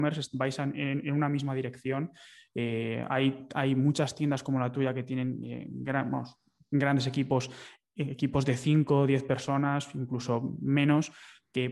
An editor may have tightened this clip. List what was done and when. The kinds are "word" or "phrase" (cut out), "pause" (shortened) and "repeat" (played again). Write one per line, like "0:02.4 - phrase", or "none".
none